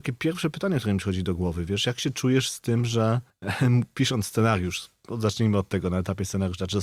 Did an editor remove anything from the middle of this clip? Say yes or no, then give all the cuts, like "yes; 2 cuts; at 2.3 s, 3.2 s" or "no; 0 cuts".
yes; 1 cut; at 3.3 s